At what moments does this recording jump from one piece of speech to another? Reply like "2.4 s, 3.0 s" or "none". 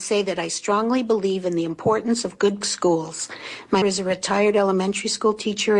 2.6 s, 3.8 s